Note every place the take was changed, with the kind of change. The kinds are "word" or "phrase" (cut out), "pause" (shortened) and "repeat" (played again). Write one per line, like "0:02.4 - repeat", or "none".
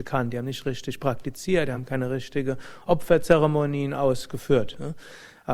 none